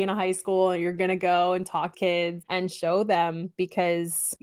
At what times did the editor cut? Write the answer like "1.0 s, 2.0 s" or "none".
1.9 s, 2.4 s